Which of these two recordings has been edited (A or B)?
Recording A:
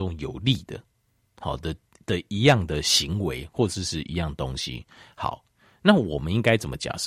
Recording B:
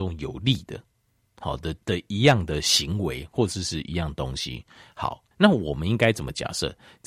B